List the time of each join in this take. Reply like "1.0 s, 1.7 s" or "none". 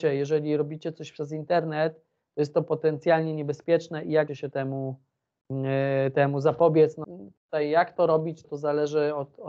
4.3 s, 7.0 s, 8.4 s